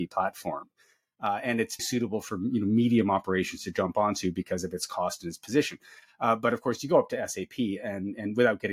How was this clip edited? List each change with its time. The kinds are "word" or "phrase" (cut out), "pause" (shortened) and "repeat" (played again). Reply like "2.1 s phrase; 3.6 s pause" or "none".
1.8 s word